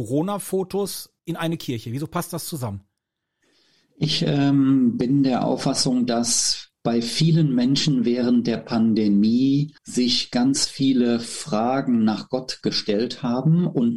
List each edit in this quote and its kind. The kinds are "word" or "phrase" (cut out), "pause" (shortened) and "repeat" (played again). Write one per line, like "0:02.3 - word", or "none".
0:01.2 - pause
0:09.8 - pause